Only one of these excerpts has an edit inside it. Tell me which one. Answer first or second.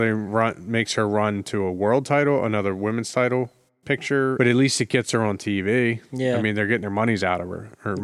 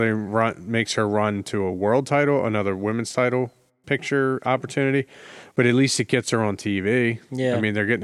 first